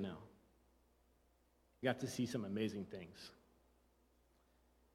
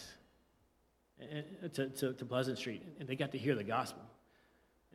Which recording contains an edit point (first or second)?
first